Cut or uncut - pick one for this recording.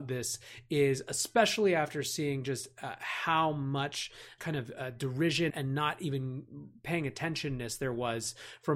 cut